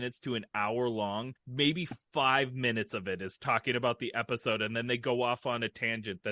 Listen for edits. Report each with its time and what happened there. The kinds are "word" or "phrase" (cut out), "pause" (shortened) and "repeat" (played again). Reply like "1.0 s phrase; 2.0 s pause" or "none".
1.4 s pause